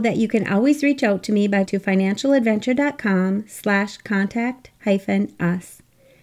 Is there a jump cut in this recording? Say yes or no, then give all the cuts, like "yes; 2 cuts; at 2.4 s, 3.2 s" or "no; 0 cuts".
yes; 1 cut; at 1.7 s